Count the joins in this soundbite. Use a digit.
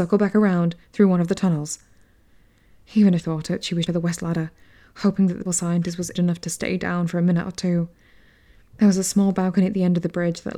4